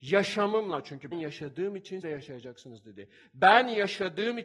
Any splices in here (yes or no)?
yes